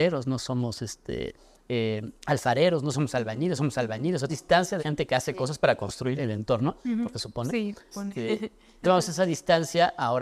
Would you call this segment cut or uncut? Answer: cut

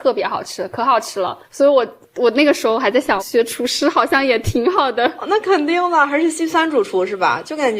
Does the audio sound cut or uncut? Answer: cut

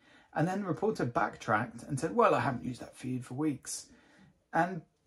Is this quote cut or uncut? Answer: uncut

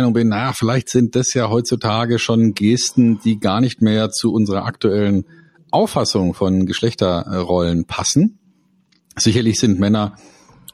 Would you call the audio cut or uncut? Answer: uncut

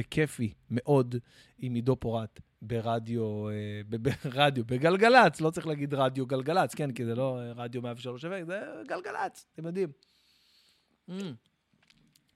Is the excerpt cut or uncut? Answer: uncut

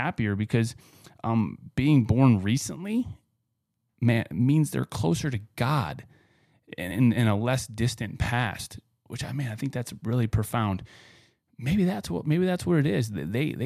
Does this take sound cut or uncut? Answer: uncut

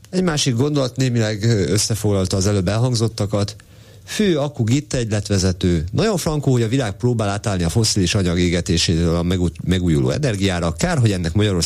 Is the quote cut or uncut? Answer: uncut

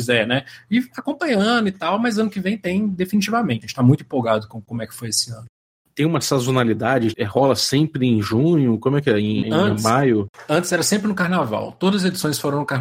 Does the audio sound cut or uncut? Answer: cut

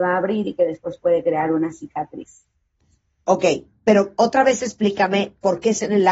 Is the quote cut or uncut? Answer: uncut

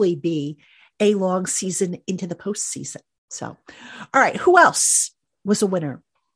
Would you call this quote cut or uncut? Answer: uncut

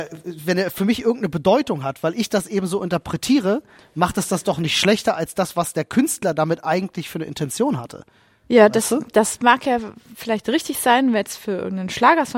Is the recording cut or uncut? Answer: uncut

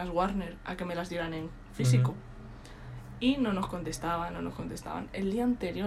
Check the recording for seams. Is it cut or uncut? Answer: uncut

